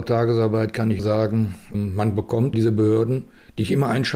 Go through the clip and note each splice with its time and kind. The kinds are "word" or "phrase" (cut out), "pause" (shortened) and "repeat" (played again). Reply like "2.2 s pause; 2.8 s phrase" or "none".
1.0 s word; 1.7 s word; 2.5 s word